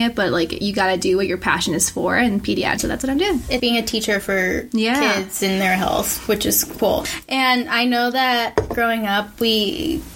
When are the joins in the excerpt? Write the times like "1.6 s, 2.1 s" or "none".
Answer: 2.8 s, 3.6 s